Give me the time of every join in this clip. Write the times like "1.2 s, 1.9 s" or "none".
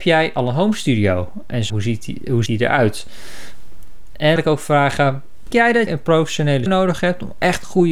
1.7 s, 2.5 s, 4.4 s, 5.5 s, 5.9 s, 6.7 s